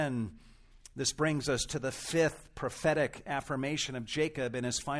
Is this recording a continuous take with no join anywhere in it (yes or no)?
yes